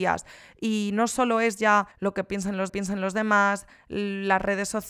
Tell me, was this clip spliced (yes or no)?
yes